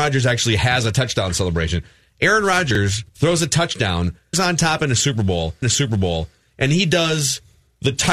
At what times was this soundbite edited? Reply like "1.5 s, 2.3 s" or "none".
3.1 s, 4.3 s, 5.6 s